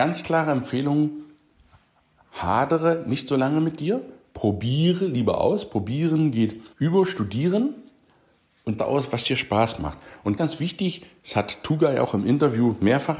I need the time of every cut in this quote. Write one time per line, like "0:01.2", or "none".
0:06.7
0:08.8
0:10.4